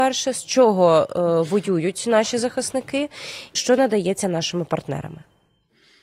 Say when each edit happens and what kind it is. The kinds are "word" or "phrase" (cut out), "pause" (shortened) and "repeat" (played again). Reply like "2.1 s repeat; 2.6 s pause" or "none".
3.6 s word